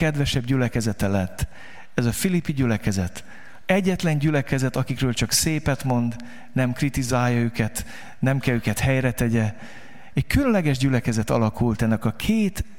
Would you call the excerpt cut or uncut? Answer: uncut